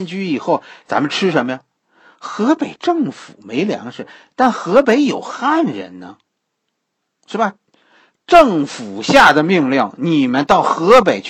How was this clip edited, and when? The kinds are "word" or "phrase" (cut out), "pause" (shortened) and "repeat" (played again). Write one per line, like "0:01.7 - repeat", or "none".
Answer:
none